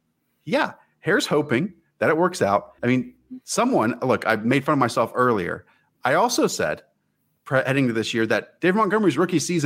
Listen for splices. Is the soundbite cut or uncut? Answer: cut